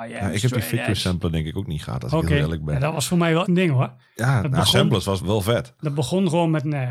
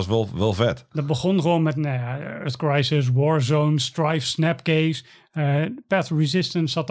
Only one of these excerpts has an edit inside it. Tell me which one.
first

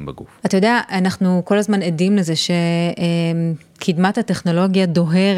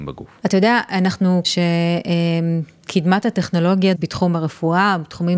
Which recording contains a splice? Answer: second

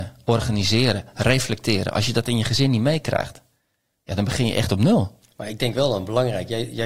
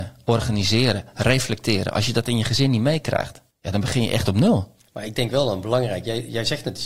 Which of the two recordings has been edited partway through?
second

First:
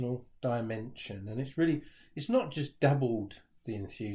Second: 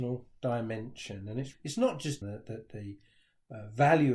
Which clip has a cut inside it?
second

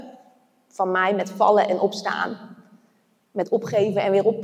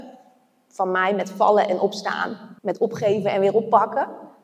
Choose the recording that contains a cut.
second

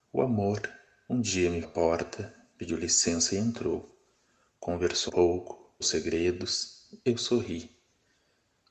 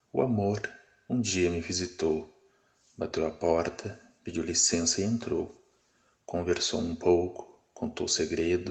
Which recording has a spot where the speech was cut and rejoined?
first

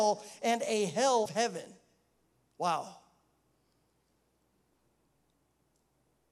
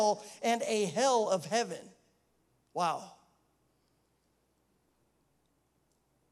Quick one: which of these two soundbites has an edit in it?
first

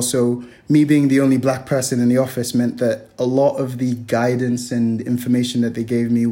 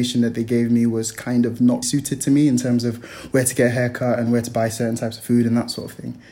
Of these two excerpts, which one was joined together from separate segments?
second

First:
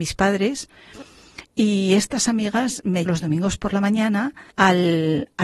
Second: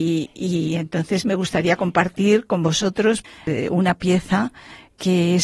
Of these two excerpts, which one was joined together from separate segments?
first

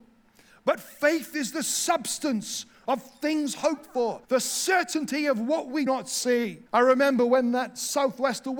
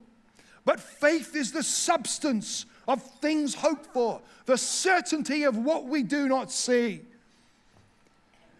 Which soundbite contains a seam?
first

